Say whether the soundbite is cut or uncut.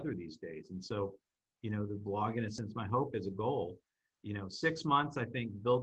uncut